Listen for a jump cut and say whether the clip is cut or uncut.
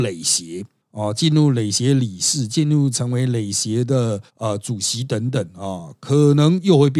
cut